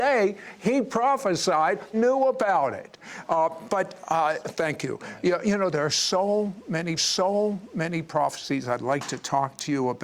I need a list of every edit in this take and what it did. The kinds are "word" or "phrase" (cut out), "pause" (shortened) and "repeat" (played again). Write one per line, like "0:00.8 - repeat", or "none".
0:01.9 - phrase
0:04.4 - phrase
0:07.0 - repeat